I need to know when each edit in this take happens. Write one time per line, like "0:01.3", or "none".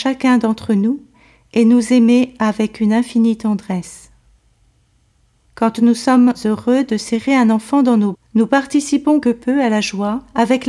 0:08.1
0:09.2

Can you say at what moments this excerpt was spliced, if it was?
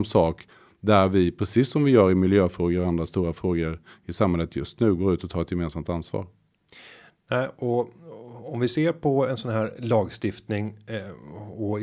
none

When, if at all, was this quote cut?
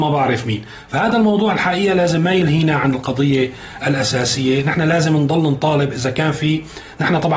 none

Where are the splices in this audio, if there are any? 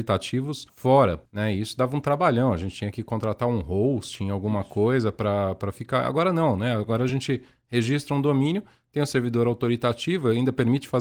none

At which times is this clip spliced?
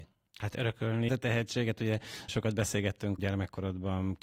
0:01.1
0:02.3
0:03.2

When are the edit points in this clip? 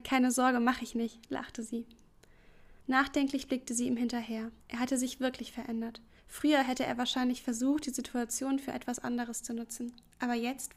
0:02.8
0:04.6
0:06.2

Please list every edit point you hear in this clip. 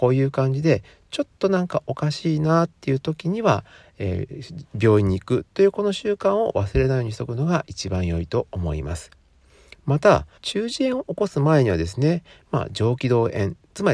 0:10.4

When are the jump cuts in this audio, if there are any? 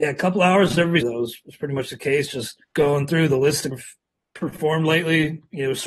0:01.0
0:02.6
0:03.7

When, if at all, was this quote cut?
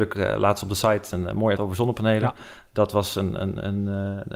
0:01.6

